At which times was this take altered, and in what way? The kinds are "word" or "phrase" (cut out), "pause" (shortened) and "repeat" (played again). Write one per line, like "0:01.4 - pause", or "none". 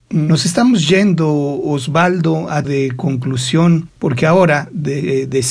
0:02.6 - word
0:04.0 - pause